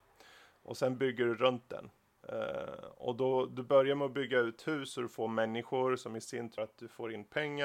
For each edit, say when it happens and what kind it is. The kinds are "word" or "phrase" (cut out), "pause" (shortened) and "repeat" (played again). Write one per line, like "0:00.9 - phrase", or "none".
0:06.6 - word